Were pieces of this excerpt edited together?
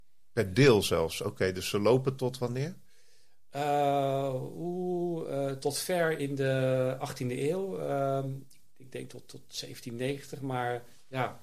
yes; 2 cuts; at 2.2 s, 5.6 s

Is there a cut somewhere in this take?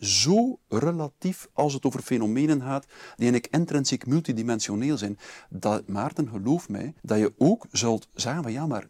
yes; 1 cut; at 7.0 s

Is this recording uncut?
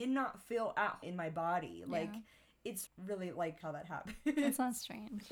no; 3 cuts; at 1.0 s, 2.9 s, 3.6 s

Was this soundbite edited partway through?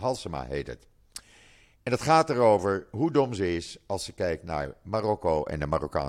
no; 0 cuts

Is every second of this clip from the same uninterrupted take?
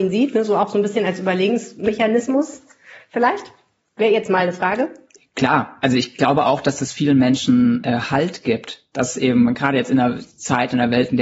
yes; 0 cuts

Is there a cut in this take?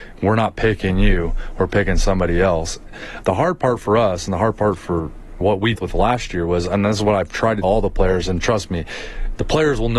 yes; 4 cuts; at 3.2 s, 5.4 s, 5.8 s, 7.6 s

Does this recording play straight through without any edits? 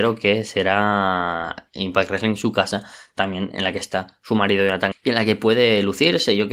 no; 1 cut; at 4.9 s

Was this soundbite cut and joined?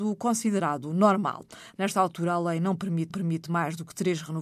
yes; 1 cut; at 3.1 s

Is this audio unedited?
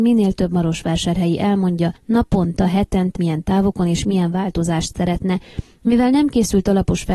no; 2 cuts; at 2.0 s, 3.2 s

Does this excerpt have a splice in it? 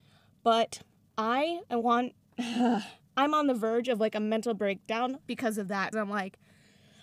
yes; 2 cuts; at 5.2 s, 5.9 s

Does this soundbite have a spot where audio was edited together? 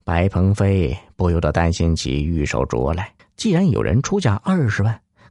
yes; 1 cut; at 3.2 s

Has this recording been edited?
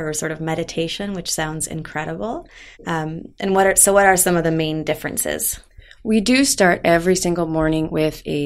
yes; 1 cut; at 2.7 s

